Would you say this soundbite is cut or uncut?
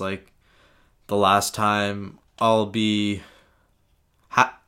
cut